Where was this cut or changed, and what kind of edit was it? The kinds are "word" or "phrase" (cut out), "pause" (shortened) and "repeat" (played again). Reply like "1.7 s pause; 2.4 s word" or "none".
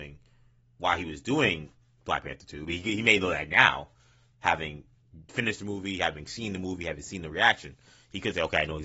none